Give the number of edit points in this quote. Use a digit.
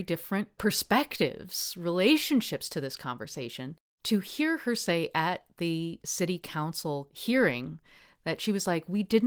0